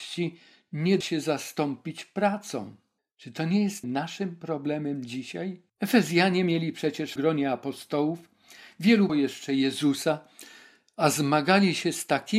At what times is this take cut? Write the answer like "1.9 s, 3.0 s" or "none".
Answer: 1.0 s, 3.0 s, 3.8 s, 5.7 s, 7.2 s, 9.1 s